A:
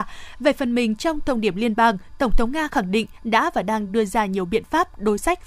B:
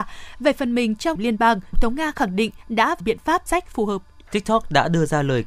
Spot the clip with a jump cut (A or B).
B